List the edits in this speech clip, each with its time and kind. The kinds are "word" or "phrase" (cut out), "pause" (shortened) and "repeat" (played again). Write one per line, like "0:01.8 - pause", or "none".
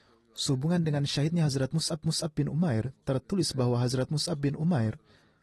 0:02.0 - repeat